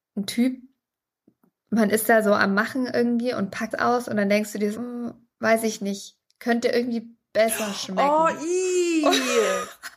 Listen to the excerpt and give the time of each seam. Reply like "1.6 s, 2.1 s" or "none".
3.7 s, 4.7 s, 5.3 s